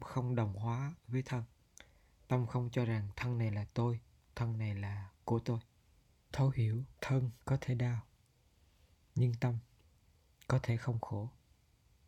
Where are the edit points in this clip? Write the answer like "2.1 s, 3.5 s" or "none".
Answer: 1.0 s, 6.3 s, 7.0 s